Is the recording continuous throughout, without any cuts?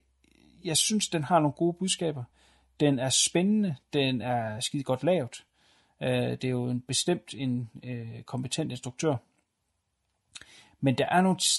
yes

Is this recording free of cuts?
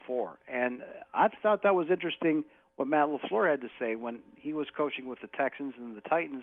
yes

